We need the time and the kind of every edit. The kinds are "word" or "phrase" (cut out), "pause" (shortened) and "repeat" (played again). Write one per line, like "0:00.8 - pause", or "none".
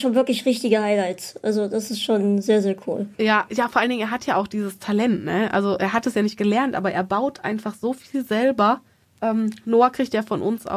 0:03.1 - pause
0:09.0 - pause